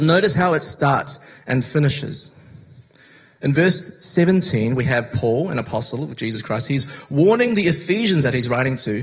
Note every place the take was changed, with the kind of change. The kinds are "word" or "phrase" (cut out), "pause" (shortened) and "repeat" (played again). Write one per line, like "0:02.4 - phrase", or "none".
none